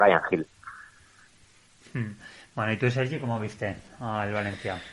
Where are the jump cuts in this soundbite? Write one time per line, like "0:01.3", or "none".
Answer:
none